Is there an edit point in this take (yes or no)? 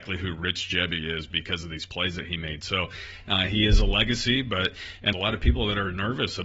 yes